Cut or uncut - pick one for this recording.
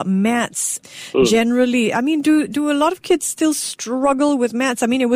uncut